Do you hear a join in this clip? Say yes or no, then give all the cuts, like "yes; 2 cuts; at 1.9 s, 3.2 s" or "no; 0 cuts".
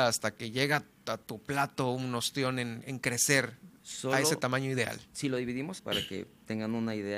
yes; 2 cuts; at 3.8 s, 5.8 s